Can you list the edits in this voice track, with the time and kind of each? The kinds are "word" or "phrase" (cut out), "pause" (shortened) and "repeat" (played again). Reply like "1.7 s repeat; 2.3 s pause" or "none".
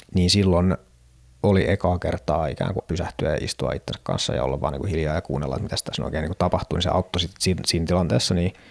2.8 s word